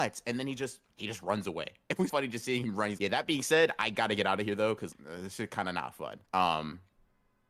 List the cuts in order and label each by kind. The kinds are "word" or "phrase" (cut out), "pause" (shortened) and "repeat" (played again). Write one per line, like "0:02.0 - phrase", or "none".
0:02.1 - word
0:03.0 - word
0:04.9 - word
0:06.2 - pause